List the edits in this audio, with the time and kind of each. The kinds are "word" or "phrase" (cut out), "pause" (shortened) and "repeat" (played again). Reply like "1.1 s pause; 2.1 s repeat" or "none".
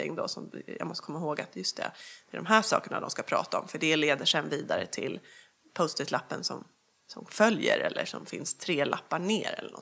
none